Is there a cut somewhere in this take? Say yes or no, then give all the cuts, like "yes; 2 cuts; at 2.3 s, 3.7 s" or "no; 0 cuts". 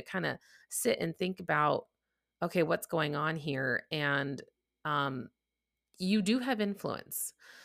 no; 0 cuts